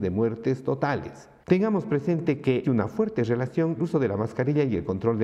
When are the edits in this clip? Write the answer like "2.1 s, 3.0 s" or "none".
1.4 s, 2.6 s, 3.8 s